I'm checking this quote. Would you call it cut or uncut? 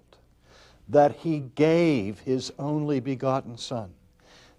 uncut